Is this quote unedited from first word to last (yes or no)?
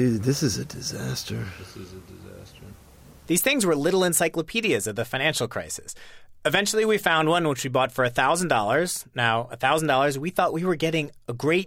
yes